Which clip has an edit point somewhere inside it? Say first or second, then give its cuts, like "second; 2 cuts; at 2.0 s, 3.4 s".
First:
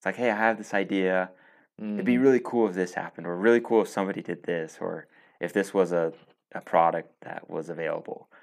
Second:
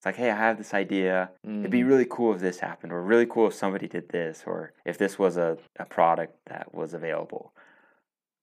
second; 3 cuts; at 1.4 s, 4.8 s, 5.7 s